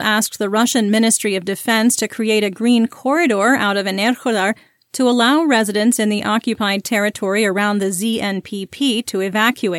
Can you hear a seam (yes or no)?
no